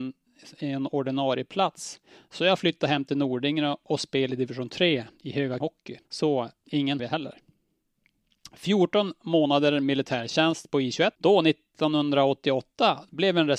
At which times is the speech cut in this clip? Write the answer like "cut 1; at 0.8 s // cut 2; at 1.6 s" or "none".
cut 1; at 5.6 s // cut 2; at 6.0 s // cut 3; at 7.0 s // cut 4; at 11.1 s